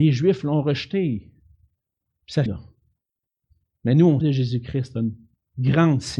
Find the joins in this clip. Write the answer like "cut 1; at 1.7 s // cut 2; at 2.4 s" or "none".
cut 1; at 2.5 s // cut 2; at 4.2 s